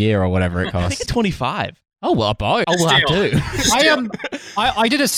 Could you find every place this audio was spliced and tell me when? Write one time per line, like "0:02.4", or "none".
0:01.1
0:02.6